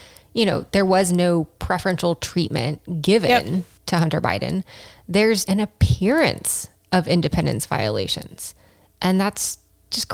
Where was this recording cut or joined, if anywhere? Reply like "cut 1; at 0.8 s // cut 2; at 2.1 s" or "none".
cut 1; at 5.4 s